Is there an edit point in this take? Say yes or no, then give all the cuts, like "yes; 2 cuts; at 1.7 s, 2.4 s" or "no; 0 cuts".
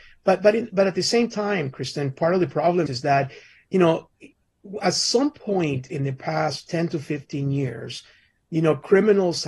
yes; 1 cut; at 2.9 s